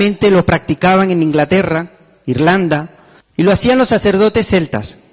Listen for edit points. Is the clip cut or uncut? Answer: cut